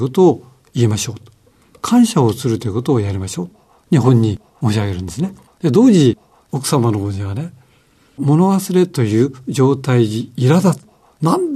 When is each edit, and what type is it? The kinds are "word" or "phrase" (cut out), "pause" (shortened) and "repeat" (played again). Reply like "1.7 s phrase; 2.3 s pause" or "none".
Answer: 5.5 s pause